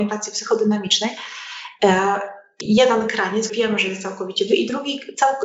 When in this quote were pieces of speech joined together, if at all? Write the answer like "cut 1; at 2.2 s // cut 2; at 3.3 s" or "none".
cut 1; at 2.6 s // cut 2; at 3.5 s // cut 3; at 4.5 s

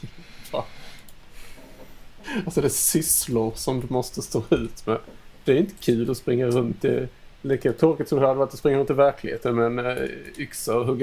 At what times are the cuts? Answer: cut 1; at 7.4 s

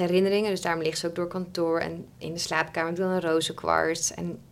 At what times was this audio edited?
none

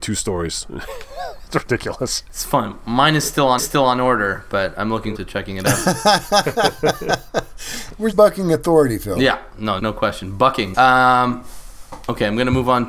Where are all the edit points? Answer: cut 1; at 3.6 s // cut 2; at 5.1 s // cut 3; at 8.1 s // cut 4; at 9.8 s // cut 5; at 10.7 s

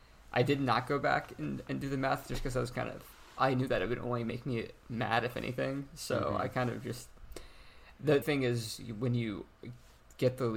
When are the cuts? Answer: cut 1; at 8.2 s

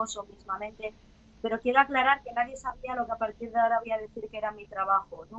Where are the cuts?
none

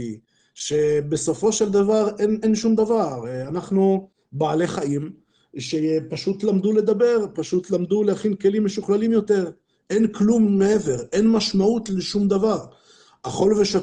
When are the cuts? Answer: none

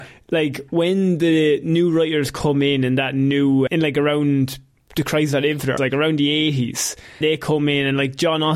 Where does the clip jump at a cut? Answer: cut 1; at 3.7 s // cut 2; at 5.8 s // cut 3; at 7.2 s

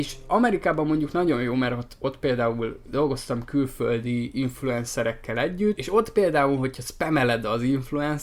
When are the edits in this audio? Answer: cut 1; at 5.8 s

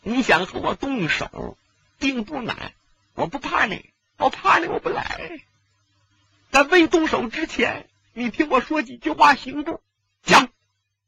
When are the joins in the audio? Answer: none

